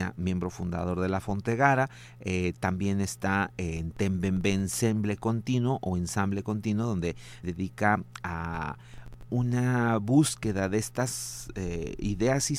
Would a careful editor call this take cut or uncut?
cut